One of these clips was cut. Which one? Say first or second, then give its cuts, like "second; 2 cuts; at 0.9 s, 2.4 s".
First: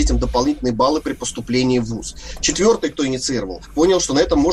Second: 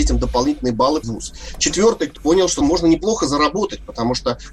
second; 3 cuts; at 1.0 s, 2.2 s, 2.6 s